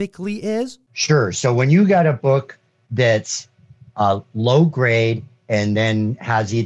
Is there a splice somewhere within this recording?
no; 0 cuts

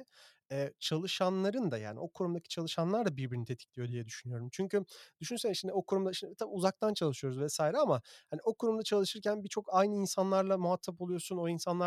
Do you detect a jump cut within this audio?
no; 0 cuts

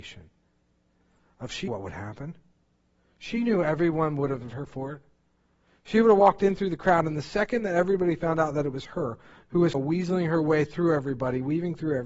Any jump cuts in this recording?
yes; 3 cuts; at 1.7 s, 4.5 s, 9.7 s

